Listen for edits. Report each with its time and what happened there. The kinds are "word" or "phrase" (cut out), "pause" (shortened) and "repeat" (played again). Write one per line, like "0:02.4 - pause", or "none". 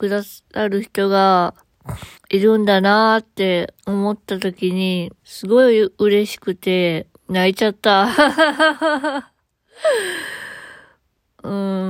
0:02.2 - pause
0:03.8 - pause
0:05.2 - pause
0:07.1 - pause